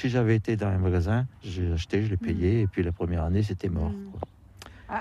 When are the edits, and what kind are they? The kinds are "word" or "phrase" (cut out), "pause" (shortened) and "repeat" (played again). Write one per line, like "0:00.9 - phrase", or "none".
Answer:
0:01.4 - pause